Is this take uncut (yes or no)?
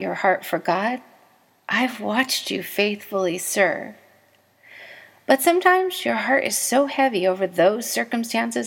yes